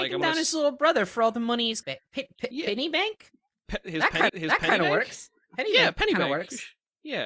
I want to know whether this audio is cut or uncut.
cut